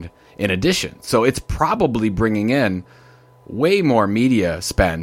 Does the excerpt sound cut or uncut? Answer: uncut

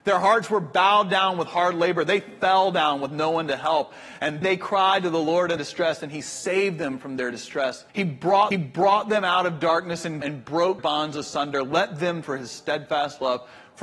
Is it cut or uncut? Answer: cut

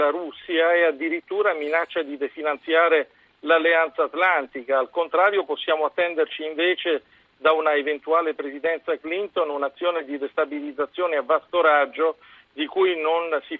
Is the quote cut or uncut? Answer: uncut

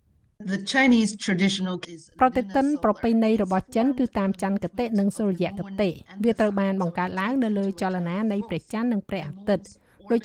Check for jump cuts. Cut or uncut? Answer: cut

